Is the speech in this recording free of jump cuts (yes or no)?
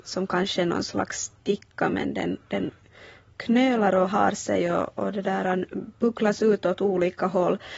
yes